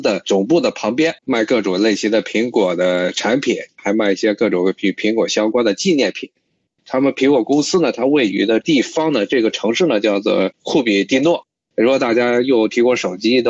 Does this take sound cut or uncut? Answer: cut